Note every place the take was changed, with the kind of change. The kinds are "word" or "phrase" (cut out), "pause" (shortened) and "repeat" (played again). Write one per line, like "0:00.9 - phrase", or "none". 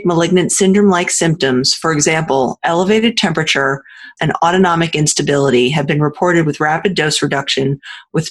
0:04.2 - phrase